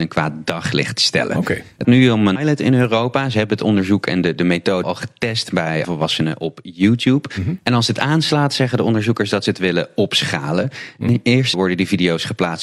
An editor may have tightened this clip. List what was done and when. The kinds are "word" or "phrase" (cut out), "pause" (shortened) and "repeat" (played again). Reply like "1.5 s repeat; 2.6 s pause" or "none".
1.8 s word; 2.4 s word; 4.8 s word; 5.8 s word; 11.5 s word